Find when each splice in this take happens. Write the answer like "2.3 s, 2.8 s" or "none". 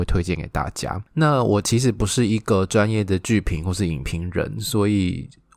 1.1 s